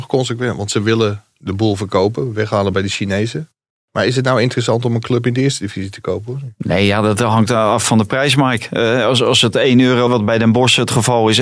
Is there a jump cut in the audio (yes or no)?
yes